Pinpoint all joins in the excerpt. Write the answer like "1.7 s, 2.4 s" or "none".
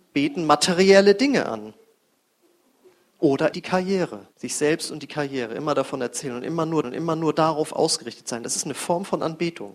3.5 s, 4.3 s, 6.8 s